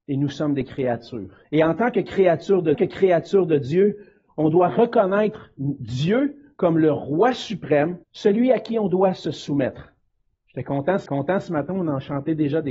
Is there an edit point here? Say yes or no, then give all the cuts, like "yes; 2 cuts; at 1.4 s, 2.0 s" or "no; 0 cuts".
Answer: yes; 4 cuts; at 1.4 s, 2.7 s, 8.0 s, 11.1 s